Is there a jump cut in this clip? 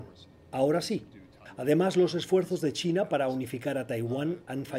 no; 0 cuts

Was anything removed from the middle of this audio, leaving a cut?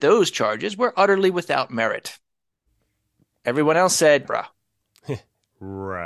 yes; 1 cut; at 4.2 s

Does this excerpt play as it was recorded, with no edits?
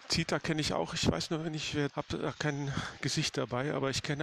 no; 1 cut; at 1.9 s

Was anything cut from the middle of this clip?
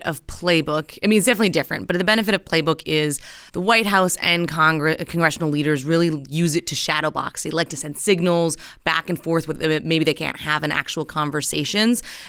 yes; 1 cut; at 3.5 s

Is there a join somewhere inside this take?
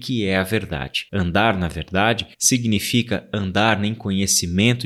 yes; 2 cuts; at 1.1 s, 2.3 s

